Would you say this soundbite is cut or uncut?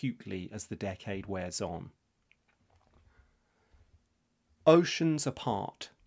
uncut